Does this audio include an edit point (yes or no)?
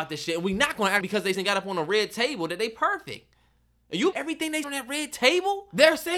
yes